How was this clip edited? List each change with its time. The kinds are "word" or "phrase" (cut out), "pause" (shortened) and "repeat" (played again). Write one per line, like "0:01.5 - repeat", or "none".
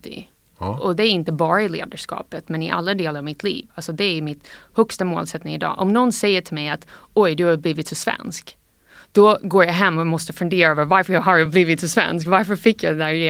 none